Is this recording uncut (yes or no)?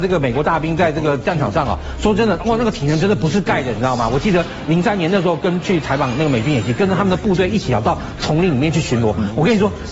yes